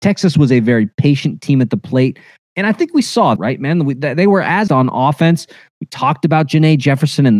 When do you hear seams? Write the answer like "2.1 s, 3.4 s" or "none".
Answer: 3.4 s, 4.7 s